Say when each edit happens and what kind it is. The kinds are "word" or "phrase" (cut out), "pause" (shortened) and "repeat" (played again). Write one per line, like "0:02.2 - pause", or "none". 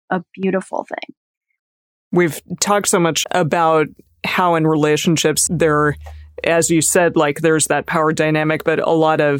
0:01.8 - pause
0:03.2 - phrase
0:05.5 - word